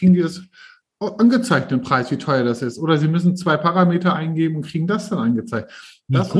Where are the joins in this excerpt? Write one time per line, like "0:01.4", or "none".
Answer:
none

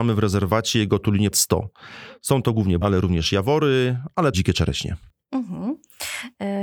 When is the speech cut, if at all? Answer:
0:01.3
0:02.8
0:04.3

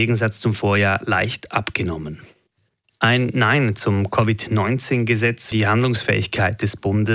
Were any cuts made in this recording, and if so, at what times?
0:02.8
0:05.5

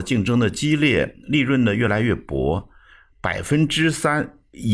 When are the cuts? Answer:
none

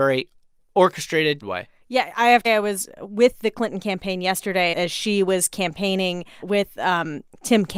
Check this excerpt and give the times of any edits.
0:01.4
0:02.5
0:04.7
0:06.4

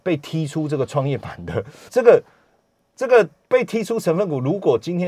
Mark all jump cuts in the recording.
0:01.9

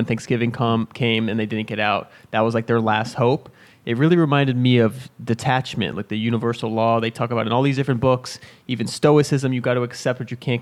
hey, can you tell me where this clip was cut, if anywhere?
none

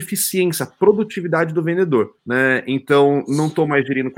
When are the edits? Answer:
0:02.2

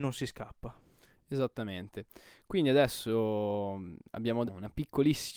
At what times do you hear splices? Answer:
0:04.5

